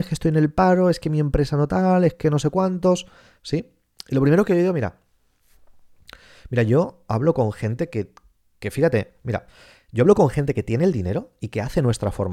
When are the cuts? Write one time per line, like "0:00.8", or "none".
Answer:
none